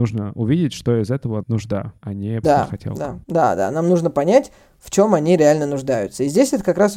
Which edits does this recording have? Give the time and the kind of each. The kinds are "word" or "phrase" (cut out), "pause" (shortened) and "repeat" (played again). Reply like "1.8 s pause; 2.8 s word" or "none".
1.4 s word; 2.0 s pause; 2.4 s word; 3.2 s pause